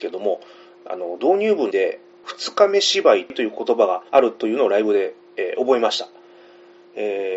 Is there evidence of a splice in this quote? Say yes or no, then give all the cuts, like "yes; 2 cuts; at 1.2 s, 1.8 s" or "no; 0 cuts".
yes; 2 cuts; at 1.7 s, 4.1 s